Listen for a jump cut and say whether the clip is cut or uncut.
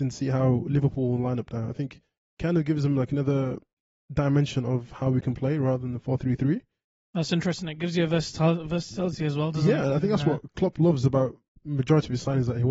uncut